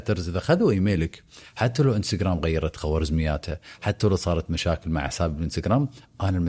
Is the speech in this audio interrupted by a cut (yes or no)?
no